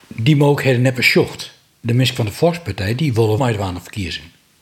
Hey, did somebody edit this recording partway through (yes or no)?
yes